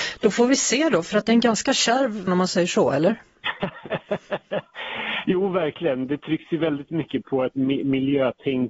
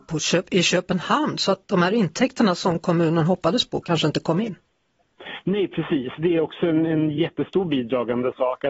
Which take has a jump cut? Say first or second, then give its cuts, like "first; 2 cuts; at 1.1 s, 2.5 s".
first; 2 cuts; at 2.3 s, 7.2 s